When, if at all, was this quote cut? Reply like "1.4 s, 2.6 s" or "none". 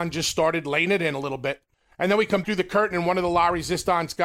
1.7 s, 2.4 s